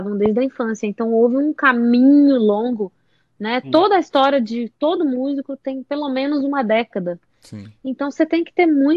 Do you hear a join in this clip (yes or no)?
no